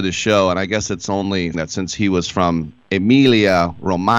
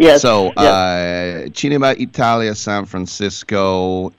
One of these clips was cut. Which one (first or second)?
first